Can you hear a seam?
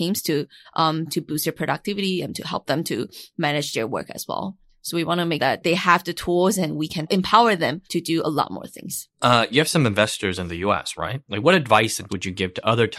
yes; 4 cuts; at 1.1 s, 5.4 s, 7.9 s, 12.1 s

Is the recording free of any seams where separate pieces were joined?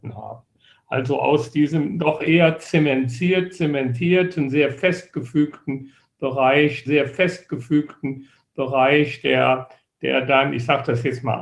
no; 1 cut; at 6.9 s

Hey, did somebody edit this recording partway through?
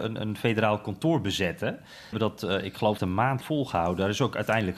yes; 3 cuts; at 2.1 s, 3.0 s, 3.4 s

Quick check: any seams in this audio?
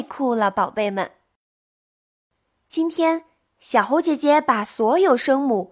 no; 0 cuts

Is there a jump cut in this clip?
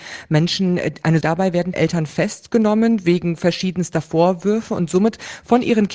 yes; 2 cuts; at 1.2 s, 1.7 s

